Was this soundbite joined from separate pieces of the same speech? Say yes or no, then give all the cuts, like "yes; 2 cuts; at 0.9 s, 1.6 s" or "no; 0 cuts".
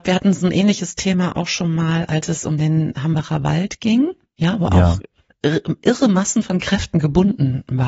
no; 0 cuts